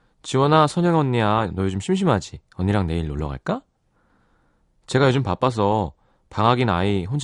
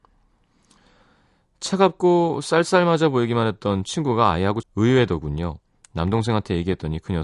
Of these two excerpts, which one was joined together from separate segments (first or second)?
second